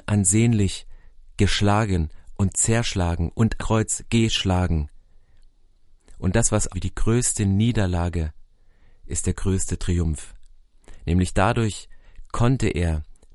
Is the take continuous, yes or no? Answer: no